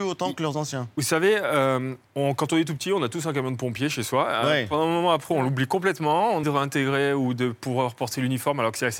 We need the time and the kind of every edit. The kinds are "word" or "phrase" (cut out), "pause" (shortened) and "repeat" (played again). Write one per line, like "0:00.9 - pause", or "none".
0:02.0 - pause
0:06.4 - word